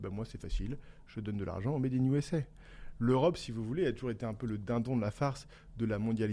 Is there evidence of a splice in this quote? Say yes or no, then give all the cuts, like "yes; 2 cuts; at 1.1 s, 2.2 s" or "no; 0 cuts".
no; 0 cuts